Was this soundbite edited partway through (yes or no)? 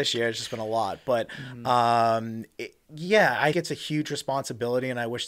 yes